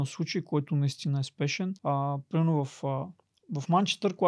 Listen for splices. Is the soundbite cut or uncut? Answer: cut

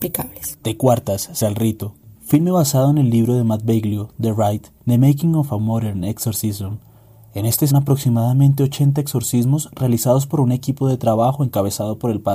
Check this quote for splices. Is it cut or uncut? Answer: cut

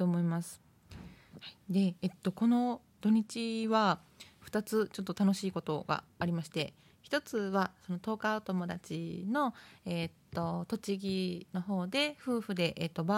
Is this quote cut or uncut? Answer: uncut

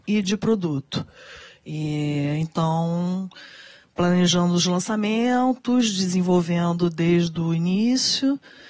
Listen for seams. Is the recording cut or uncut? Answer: uncut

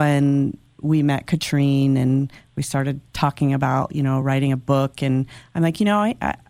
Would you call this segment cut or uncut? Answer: uncut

